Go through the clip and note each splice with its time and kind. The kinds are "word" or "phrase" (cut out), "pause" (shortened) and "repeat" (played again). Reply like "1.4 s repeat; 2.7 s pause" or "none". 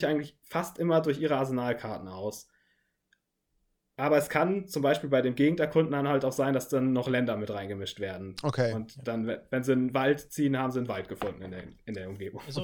none